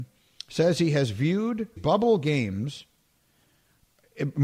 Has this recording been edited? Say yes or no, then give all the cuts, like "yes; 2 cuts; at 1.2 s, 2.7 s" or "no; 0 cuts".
yes; 1 cut; at 1.8 s